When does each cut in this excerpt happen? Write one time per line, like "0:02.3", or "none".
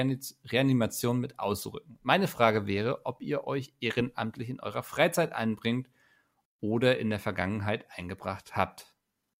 none